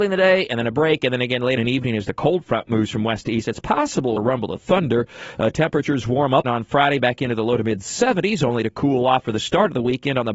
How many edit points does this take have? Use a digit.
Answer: 3